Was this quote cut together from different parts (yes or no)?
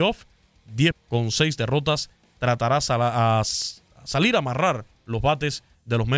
yes